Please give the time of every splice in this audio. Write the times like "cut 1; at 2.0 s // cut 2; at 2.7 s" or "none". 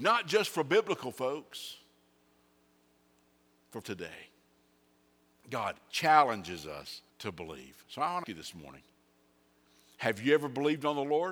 cut 1; at 3.8 s // cut 2; at 7.1 s // cut 3; at 8.2 s